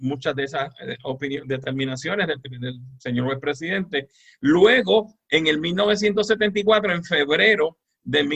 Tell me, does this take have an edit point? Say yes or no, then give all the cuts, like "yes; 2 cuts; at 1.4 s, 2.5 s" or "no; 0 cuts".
no; 0 cuts